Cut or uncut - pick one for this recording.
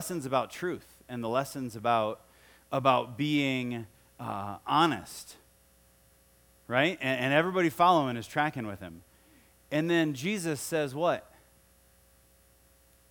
uncut